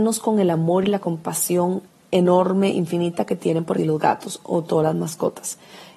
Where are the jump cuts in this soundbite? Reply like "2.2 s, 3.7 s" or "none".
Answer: 1.9 s, 3.8 s